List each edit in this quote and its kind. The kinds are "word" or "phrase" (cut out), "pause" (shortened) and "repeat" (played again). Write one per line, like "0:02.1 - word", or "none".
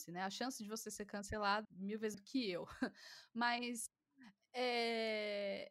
0:01.6 - word
0:02.1 - word